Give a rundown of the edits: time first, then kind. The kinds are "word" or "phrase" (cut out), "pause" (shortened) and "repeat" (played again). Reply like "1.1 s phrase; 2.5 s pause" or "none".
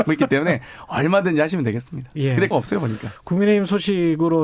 2.5 s word